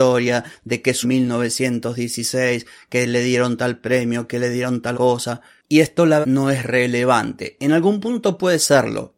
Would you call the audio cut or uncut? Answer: cut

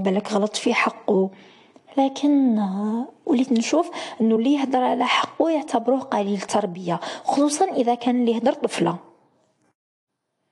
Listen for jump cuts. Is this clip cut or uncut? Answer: uncut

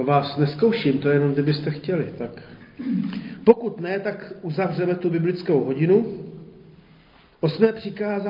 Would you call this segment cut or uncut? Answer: uncut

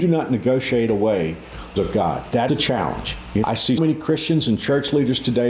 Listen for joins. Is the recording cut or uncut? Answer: cut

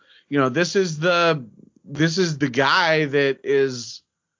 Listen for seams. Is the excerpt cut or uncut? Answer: cut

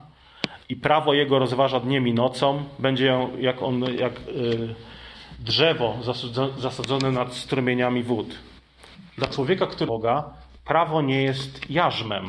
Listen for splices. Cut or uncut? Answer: cut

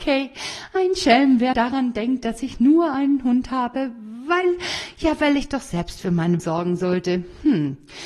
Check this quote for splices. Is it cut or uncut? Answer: cut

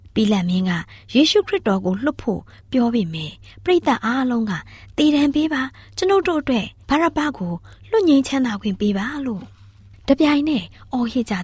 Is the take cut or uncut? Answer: uncut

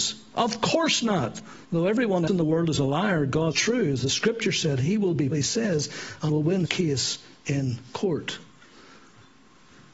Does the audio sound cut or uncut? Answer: cut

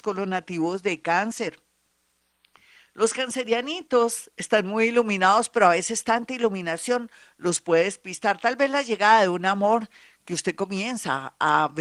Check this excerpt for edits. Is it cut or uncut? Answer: uncut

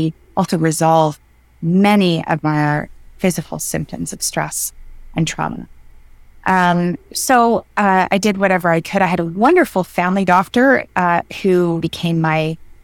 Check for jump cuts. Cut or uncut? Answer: cut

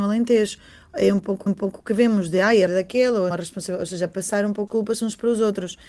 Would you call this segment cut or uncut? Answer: cut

